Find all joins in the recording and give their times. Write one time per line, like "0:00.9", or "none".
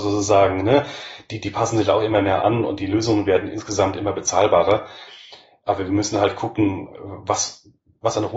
none